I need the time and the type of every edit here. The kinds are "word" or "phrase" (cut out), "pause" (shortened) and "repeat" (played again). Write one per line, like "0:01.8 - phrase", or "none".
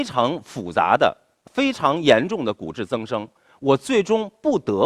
none